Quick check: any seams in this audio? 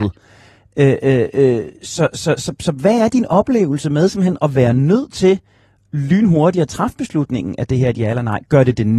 no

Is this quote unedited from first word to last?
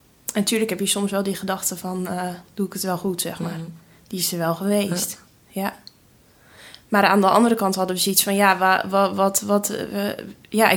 yes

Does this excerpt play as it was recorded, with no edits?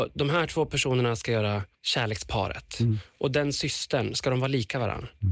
no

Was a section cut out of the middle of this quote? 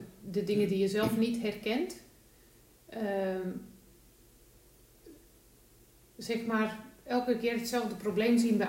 no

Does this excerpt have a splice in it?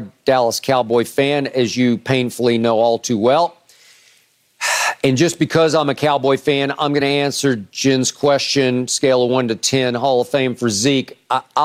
no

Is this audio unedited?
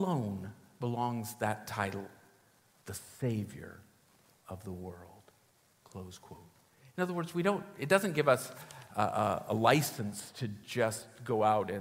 yes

